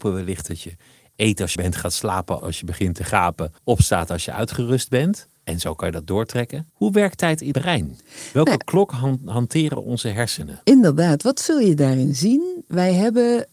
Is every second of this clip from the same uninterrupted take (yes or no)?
no